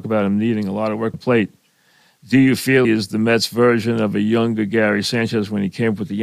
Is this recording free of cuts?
no; 2 cuts; at 1.1 s, 2.8 s

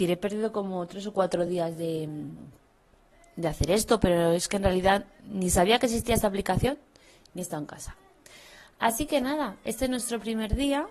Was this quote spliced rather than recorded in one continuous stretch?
no; 0 cuts

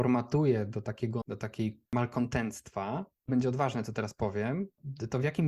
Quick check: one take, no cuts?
no; 3 cuts; at 1.2 s, 1.9 s, 3.3 s

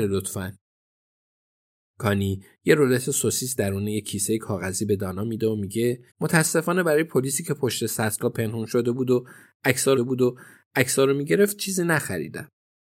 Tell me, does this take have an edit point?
yes; 2 cuts; at 6.1 s, 10.0 s

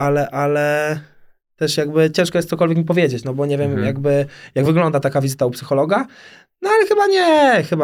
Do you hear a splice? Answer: no; 0 cuts

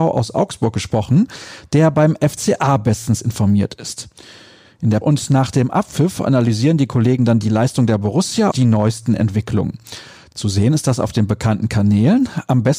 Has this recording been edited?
yes; 2 cuts; at 5.0 s, 8.5 s

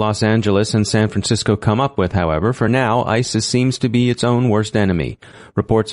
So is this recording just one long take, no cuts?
yes; 0 cuts

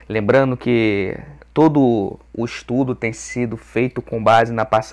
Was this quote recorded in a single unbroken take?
no; 1 cut; at 1.4 s

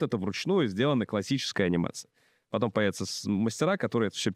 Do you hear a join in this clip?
no; 0 cuts

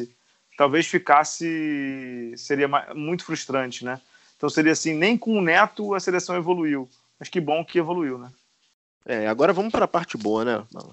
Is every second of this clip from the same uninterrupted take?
yes; 0 cuts

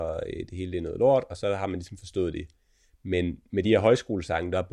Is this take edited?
no; 0 cuts

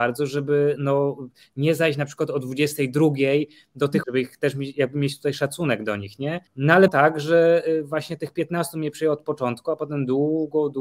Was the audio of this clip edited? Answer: yes; 3 cuts; at 4.0 s, 6.5 s, 6.9 s

